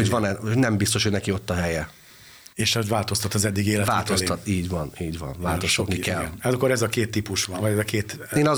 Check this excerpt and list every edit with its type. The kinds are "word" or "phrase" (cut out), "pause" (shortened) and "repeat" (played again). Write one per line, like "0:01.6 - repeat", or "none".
0:02.5 - pause